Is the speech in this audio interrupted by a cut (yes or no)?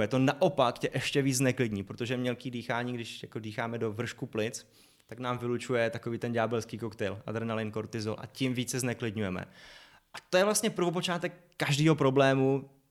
no